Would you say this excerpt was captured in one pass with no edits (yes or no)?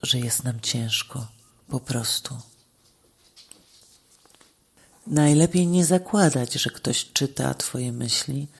yes